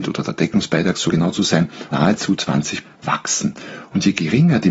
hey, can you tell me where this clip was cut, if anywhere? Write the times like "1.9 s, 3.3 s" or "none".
1.1 s, 1.9 s, 2.8 s